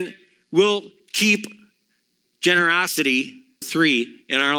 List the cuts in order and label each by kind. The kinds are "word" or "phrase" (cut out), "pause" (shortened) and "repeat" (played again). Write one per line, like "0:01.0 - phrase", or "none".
0:03.6 - word